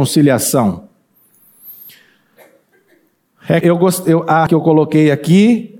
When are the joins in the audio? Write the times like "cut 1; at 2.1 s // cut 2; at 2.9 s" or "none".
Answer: cut 1; at 3.6 s // cut 2; at 4.5 s